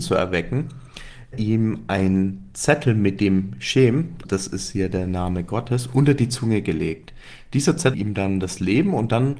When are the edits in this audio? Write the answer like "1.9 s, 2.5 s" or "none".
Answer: 1.3 s, 4.2 s, 7.9 s